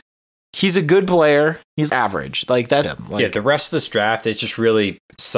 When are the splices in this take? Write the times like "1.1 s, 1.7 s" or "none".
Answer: 1.9 s, 2.8 s